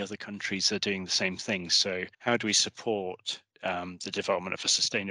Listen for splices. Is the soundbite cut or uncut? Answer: cut